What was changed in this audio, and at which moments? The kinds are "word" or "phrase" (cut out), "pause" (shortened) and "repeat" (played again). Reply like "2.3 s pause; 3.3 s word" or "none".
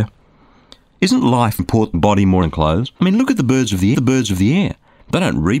1.6 s word; 1.9 s phrase; 2.4 s word; 3.0 s pause; 3.9 s repeat

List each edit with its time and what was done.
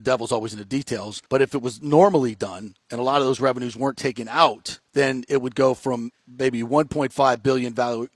1.3 s pause; 4.9 s pause

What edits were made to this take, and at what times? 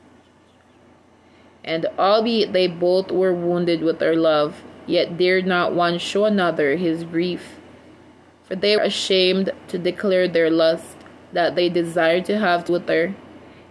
8.8 s word; 12.7 s word

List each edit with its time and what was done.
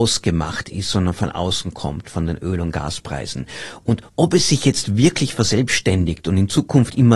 4.1 s pause

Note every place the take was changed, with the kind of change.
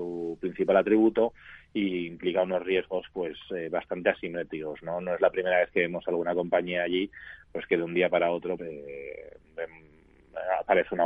8.6 s word

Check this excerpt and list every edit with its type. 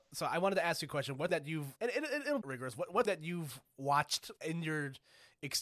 1.3 s word; 1.8 s word; 2.4 s phrase; 3.0 s word; 4.4 s pause

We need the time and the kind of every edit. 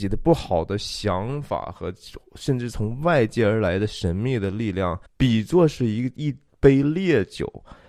5.1 s pause

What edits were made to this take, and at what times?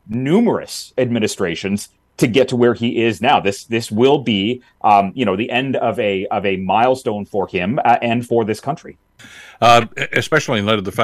8.3 s word

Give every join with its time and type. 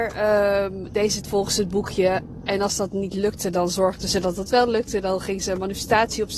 1.2 s word

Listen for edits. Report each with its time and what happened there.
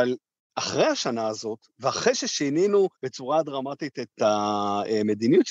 2.9 s pause

